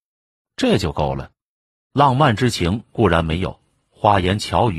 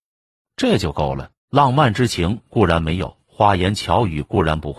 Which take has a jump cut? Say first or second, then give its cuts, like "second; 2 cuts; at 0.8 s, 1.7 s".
second; 2 cuts; at 1.4 s, 3.2 s